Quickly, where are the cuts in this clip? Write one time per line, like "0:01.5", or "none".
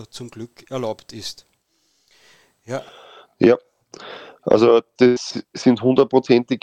0:05.0